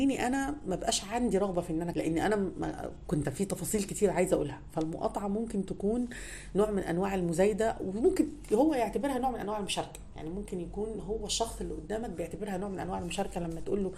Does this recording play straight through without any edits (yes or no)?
no